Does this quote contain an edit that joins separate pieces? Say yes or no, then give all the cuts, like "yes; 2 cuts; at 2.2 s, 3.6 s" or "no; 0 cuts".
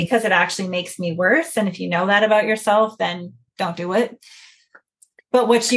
no; 0 cuts